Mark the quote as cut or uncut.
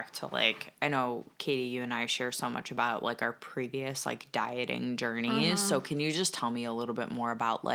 uncut